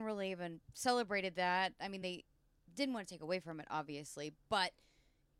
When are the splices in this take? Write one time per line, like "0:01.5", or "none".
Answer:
none